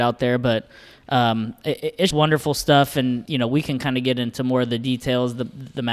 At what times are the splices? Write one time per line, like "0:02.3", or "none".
0:02.1
0:03.3

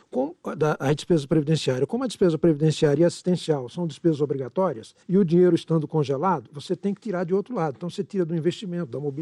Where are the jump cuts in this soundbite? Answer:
0:05.0

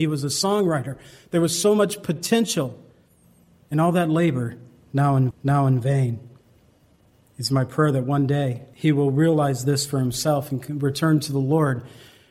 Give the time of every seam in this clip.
0:05.3

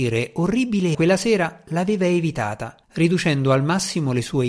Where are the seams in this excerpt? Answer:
0:00.9
0:02.8

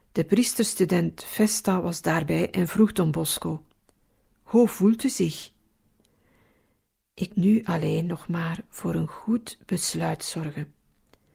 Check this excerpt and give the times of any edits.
0:07.3

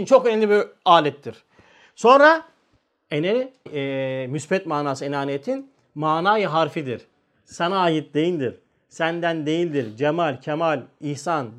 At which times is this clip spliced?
0:03.7

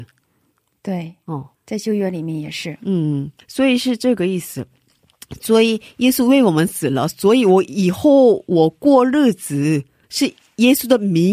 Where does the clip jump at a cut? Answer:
0:01.5
0:03.4
0:10.0

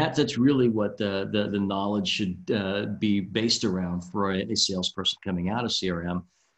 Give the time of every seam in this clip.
none

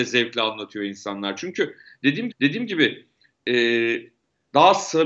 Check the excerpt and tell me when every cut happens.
0:02.3

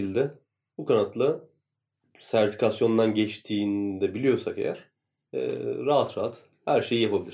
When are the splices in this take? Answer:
none

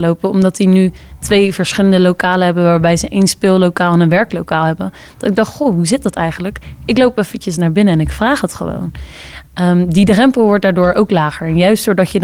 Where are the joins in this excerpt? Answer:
none

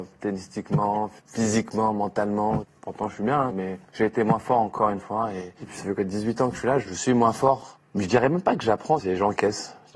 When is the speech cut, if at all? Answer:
0:01.2

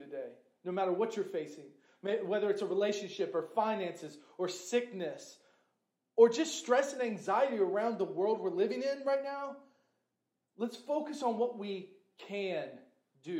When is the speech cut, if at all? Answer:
none

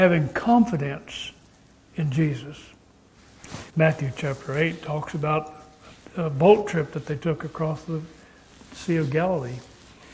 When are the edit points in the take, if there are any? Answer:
0:03.7

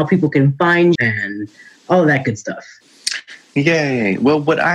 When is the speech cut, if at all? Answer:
0:00.9

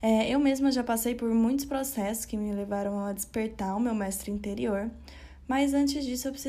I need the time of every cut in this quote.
none

